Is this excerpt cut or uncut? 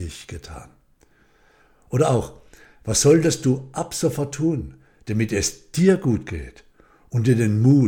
uncut